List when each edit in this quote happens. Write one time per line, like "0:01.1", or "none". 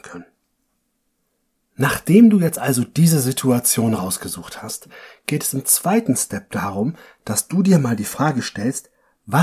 none